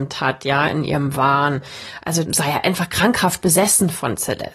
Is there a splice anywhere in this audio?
yes; 1 cut; at 2.2 s

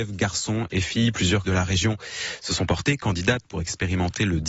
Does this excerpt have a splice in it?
yes; 1 cut; at 1.5 s

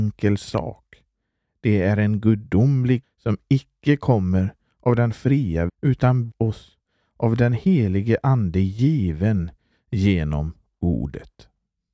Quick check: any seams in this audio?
yes; 3 cuts; at 3.0 s, 5.7 s, 6.3 s

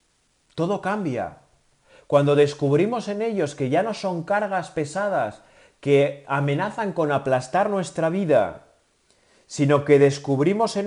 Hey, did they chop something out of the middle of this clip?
no; 0 cuts

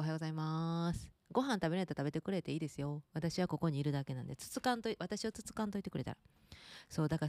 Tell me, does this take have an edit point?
yes; 1 cut; at 3.1 s

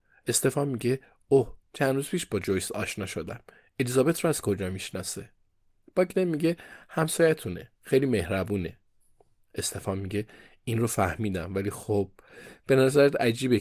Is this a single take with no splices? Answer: yes; 0 cuts

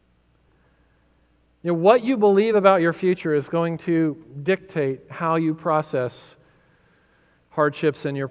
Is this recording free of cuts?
yes; 0 cuts

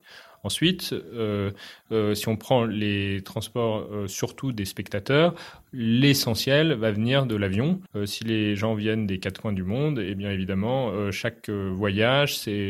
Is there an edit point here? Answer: yes; 1 cut; at 7.9 s

